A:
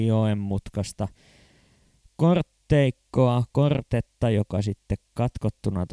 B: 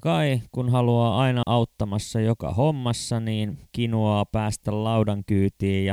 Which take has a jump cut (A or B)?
B